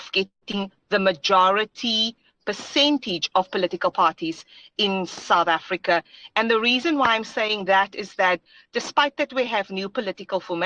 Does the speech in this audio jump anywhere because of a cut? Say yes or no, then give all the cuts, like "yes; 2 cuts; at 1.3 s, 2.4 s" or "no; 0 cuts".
no; 0 cuts